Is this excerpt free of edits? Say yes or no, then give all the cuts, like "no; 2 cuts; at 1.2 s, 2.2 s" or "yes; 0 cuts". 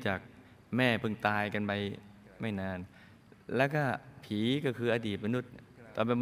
yes; 0 cuts